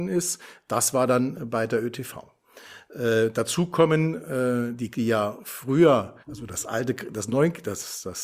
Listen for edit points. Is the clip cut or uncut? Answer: cut